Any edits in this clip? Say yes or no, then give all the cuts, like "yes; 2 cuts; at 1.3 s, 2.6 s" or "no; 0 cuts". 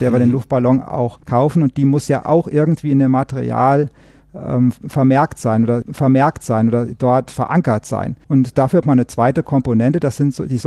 yes; 4 cuts; at 1.2 s, 5.8 s, 8.2 s, 8.8 s